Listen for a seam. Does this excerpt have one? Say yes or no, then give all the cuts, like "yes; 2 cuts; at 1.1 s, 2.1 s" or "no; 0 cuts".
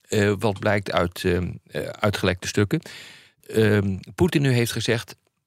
yes; 1 cut; at 3.4 s